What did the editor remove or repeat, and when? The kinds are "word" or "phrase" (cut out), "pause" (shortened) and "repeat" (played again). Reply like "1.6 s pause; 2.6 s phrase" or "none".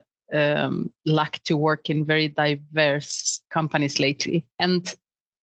1.0 s pause; 3.4 s pause; 4.5 s pause